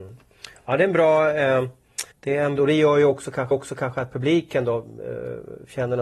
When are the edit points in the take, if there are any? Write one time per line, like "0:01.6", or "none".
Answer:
0:02.1
0:02.6
0:03.5